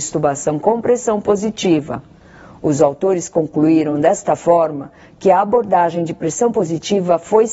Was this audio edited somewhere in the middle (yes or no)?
no